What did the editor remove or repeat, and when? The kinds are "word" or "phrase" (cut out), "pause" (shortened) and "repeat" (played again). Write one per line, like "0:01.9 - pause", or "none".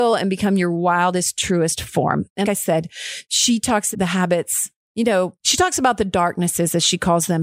0:02.4 - word
0:03.9 - word
0:05.4 - pause